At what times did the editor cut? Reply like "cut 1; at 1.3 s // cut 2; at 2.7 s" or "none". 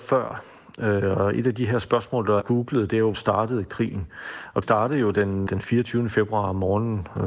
cut 1; at 2.4 s // cut 2; at 3.1 s // cut 3; at 4.6 s // cut 4; at 5.5 s